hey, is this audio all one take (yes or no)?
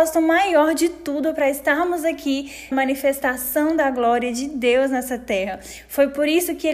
no